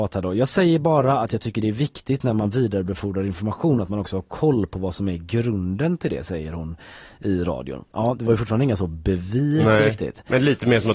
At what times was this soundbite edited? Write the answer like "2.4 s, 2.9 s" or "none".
none